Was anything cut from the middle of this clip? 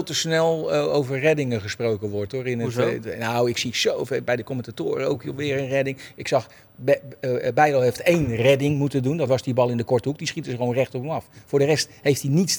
no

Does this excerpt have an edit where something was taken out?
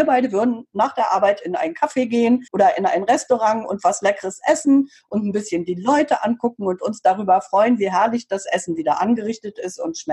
yes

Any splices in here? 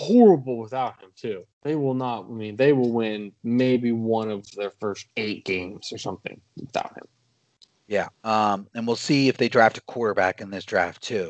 yes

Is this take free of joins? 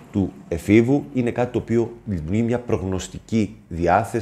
yes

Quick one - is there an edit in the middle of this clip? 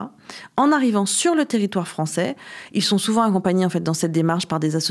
no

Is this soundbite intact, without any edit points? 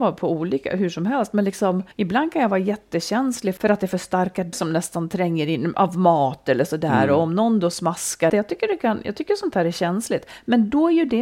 no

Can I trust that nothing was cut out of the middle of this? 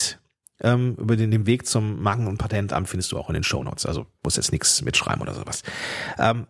yes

